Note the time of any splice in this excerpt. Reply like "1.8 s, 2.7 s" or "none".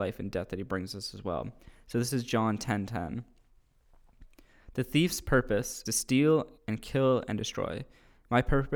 5.9 s, 6.6 s